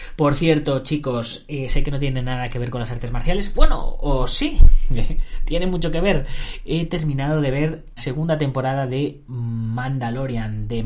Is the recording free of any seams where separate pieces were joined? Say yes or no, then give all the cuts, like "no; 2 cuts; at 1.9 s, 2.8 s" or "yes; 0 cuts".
no; 1 cut; at 8.0 s